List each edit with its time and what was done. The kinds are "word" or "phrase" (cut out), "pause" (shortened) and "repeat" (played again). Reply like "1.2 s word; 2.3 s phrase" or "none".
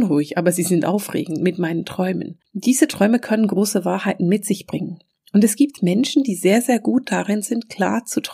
2.4 s pause